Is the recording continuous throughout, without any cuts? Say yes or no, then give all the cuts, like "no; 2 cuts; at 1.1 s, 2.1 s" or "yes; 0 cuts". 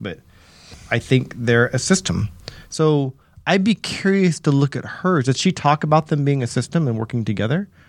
yes; 0 cuts